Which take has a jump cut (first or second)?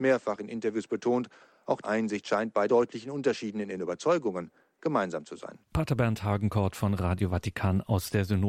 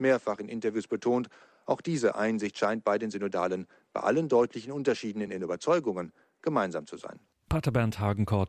first